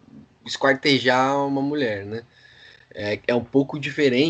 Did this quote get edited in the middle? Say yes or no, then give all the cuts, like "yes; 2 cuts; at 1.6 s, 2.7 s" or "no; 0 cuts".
no; 0 cuts